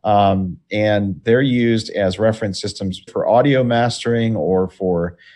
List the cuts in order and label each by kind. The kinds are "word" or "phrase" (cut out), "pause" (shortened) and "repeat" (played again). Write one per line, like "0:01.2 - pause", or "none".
0:03.1 - word